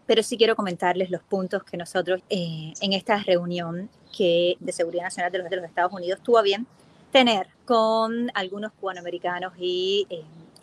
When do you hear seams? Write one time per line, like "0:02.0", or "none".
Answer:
0:02.2
0:04.6
0:05.5
0:07.5